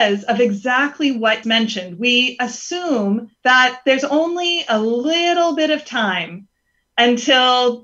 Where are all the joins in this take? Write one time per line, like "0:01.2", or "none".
0:01.4
0:03.3

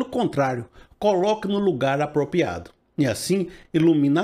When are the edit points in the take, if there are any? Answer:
none

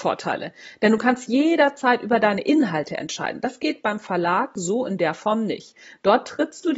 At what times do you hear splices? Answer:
none

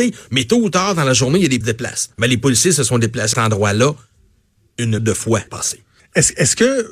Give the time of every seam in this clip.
0:01.6
0:02.1
0:03.3
0:05.0
0:05.5
0:06.0

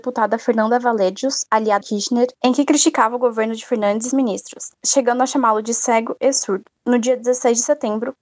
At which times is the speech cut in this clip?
0:01.8
0:04.1

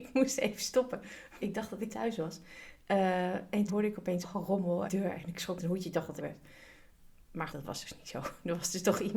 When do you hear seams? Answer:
0:01.4
0:01.9
0:03.7
0:04.2
0:04.9
0:05.6
0:06.2
0:07.5

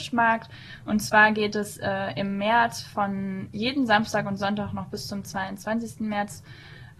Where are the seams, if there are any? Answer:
none

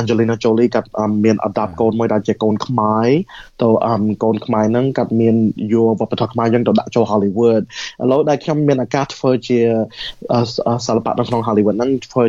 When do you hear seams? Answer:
none

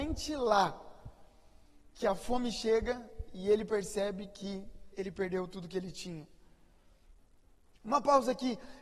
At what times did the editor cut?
none

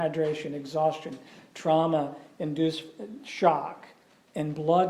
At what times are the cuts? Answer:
none

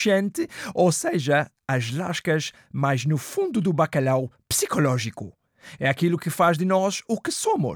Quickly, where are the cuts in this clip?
none

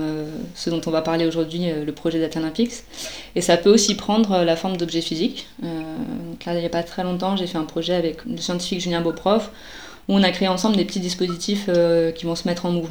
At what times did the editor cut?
0:08.2

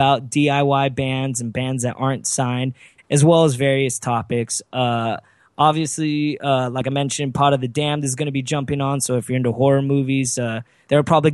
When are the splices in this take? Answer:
none

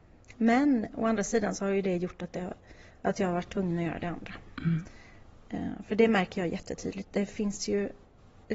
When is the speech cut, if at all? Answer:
none

